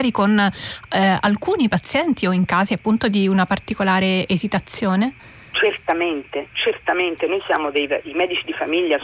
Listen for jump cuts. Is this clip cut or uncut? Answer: uncut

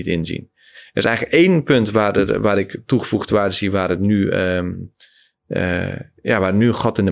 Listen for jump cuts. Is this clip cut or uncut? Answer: uncut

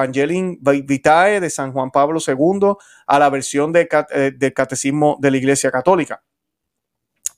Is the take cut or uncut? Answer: uncut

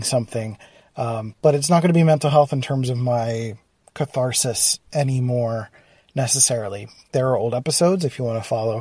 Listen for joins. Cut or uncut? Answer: uncut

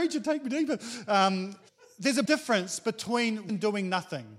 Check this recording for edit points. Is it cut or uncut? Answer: cut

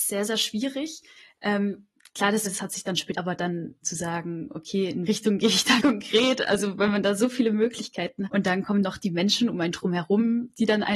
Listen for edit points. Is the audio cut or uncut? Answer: cut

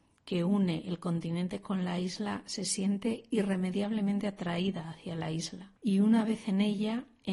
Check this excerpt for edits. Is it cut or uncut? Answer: cut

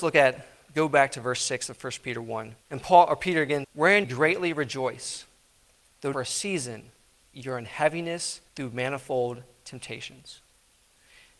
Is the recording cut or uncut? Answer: cut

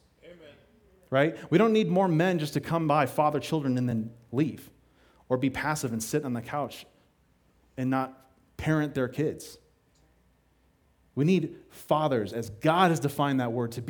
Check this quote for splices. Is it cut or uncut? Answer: uncut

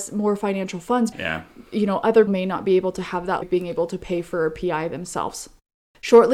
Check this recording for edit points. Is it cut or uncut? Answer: cut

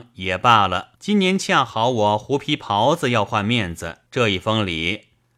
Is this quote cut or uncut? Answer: cut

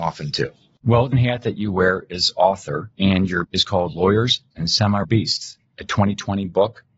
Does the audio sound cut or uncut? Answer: cut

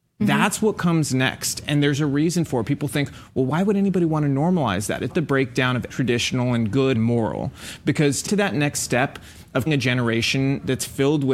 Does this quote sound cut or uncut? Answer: cut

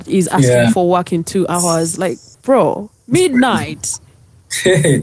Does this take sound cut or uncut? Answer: uncut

